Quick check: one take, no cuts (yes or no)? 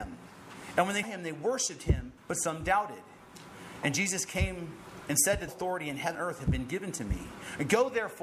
no